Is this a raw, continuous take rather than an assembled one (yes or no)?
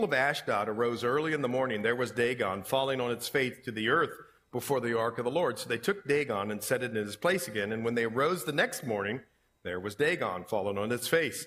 yes